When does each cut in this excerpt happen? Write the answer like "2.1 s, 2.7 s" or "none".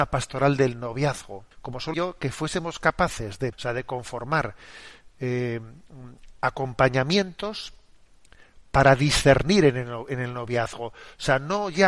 1.5 s, 1.9 s, 3.5 s